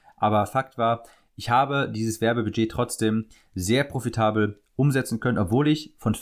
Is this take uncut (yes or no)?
yes